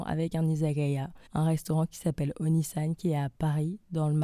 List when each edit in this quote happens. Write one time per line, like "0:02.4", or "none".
0:01.3